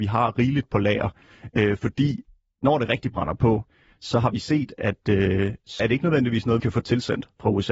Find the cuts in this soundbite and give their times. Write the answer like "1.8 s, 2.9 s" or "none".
5.8 s, 6.6 s